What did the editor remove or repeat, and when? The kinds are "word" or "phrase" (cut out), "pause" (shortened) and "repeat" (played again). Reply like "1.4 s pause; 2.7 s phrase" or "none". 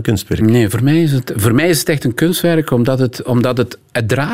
none